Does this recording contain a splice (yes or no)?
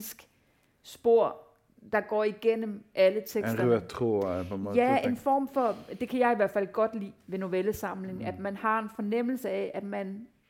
no